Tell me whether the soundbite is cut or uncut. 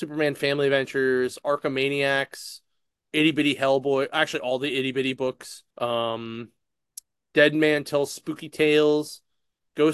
cut